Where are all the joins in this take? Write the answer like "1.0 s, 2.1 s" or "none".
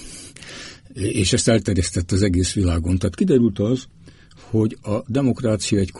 none